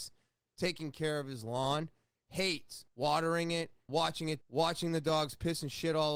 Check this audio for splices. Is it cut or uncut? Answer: cut